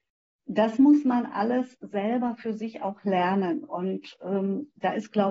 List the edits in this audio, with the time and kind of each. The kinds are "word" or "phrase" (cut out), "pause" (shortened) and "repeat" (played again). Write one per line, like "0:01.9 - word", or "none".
none